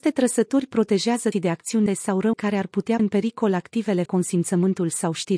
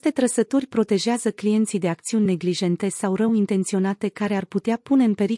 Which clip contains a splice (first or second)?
first